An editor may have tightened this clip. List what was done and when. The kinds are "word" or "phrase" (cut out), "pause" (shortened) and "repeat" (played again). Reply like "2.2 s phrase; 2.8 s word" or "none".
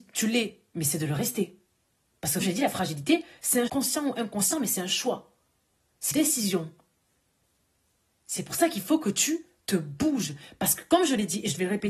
2.4 s word; 3.7 s word; 6.1 s word